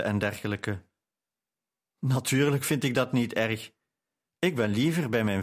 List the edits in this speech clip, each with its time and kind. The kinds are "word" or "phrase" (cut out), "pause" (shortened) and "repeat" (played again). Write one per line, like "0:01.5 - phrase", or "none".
none